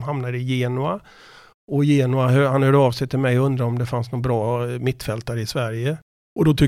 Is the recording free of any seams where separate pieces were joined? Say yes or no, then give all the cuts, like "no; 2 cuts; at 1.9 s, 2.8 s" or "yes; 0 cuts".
yes; 0 cuts